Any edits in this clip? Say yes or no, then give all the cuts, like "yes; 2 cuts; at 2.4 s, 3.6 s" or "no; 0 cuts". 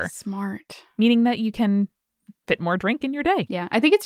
no; 0 cuts